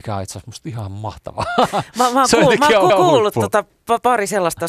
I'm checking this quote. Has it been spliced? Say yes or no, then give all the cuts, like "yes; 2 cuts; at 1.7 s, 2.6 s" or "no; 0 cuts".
yes; 1 cut; at 2.9 s